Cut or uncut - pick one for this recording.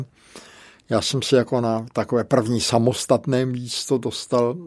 uncut